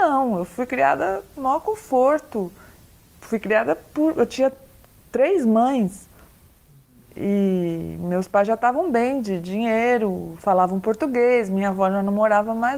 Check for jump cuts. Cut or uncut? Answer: uncut